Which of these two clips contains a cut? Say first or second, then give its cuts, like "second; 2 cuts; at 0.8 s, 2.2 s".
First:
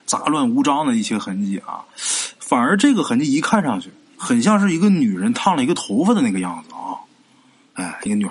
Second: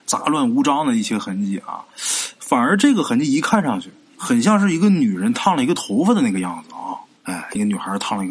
second; 1 cut; at 7.2 s